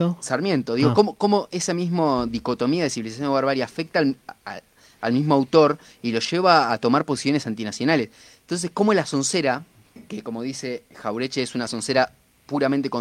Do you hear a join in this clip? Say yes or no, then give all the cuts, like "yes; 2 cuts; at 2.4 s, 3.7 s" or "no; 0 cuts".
no; 0 cuts